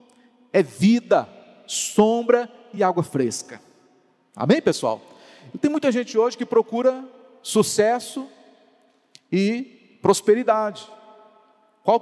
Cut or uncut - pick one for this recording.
uncut